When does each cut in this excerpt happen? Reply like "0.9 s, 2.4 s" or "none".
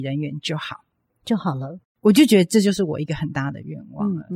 none